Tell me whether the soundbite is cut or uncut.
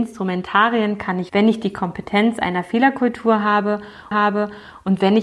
cut